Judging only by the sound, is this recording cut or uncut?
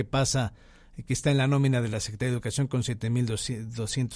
uncut